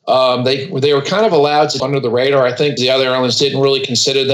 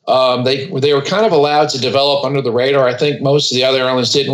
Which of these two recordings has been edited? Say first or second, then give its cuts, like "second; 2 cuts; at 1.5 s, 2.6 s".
first; 2 cuts; at 1.8 s, 2.8 s